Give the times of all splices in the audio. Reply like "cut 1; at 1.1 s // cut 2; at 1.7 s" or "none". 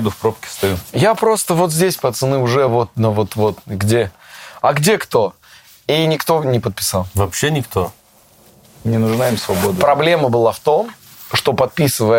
none